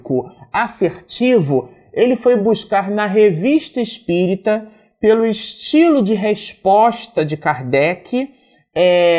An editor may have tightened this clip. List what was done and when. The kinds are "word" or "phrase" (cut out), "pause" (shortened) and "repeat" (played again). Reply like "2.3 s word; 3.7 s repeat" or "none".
none